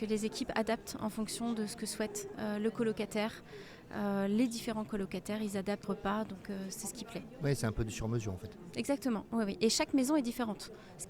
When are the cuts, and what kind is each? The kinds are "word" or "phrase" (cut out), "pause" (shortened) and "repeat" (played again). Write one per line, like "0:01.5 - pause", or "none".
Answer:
0:05.8 - phrase